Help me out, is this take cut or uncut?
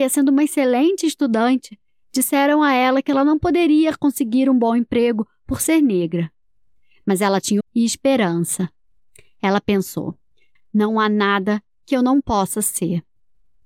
cut